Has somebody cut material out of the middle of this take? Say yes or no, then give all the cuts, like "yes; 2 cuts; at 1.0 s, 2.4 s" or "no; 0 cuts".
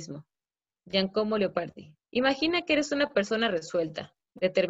yes; 1 cut; at 2.0 s